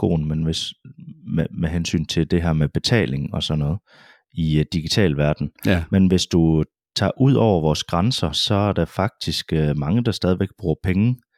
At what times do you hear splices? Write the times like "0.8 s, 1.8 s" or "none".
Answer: none